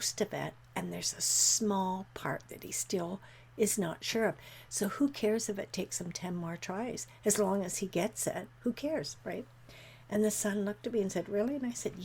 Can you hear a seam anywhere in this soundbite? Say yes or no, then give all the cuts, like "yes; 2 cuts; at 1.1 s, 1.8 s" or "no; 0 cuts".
no; 0 cuts